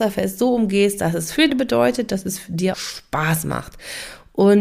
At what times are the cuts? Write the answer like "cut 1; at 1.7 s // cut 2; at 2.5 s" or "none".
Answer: cut 1; at 1.5 s // cut 2; at 2.7 s